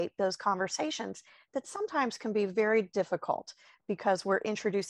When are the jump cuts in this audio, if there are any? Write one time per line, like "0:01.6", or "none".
none

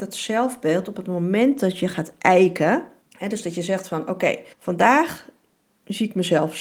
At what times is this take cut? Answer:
0:03.0
0:04.5

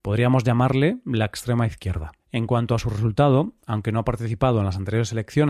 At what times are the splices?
0:02.2

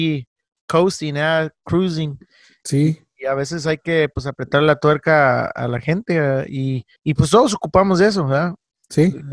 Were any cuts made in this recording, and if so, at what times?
0:07.0

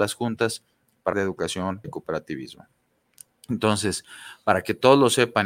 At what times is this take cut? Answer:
0:01.1
0:01.8

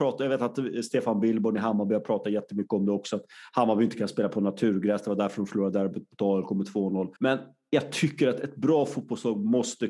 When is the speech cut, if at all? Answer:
0:07.2

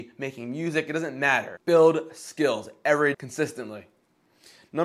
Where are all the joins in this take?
0:03.1

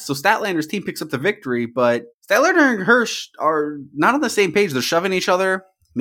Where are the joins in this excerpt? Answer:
0:02.1

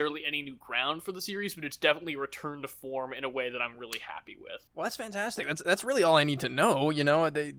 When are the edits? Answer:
none

